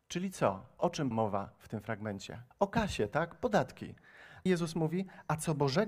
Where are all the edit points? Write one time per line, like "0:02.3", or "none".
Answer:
0:01.1
0:02.5
0:04.5